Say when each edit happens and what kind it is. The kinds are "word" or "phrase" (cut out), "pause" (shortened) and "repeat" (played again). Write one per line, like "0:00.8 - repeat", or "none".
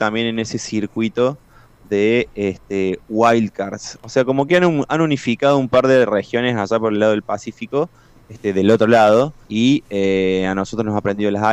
0:09.4 - pause

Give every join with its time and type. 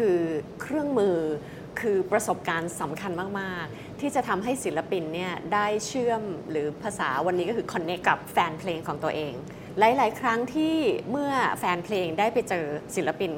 0:08.0 - word

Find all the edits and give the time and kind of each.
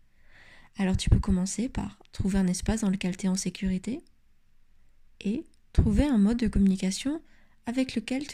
none

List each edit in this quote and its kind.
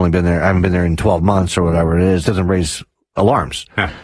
0:02.2 - phrase

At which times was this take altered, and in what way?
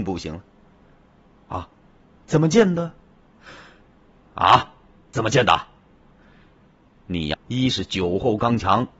0:07.3 - word

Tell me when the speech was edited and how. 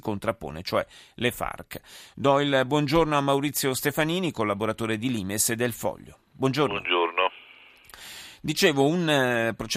none

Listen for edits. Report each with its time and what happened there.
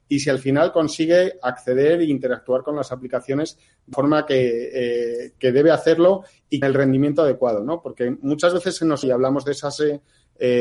0:03.9 - word
0:05.4 - word
0:06.6 - word
0:09.0 - word

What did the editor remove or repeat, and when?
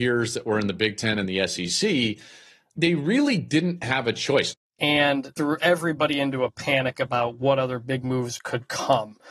0:02.8 - word
0:05.3 - word

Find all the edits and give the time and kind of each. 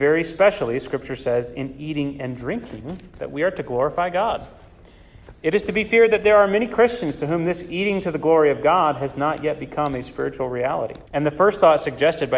0:11.1 - pause

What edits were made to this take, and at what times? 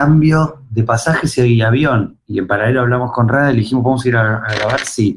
none

